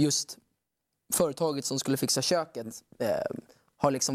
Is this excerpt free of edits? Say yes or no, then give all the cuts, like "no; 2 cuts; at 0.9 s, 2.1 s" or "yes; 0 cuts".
yes; 0 cuts